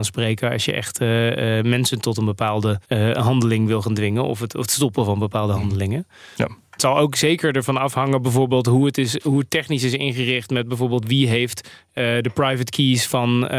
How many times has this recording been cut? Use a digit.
1